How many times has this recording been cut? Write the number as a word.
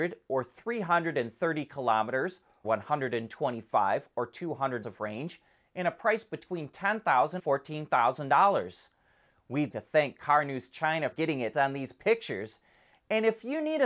six